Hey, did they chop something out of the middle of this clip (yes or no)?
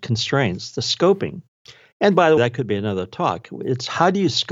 yes